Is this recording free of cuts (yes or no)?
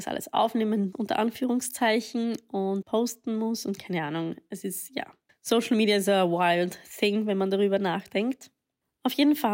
no